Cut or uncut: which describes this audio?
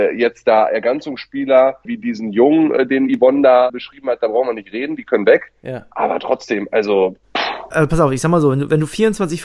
uncut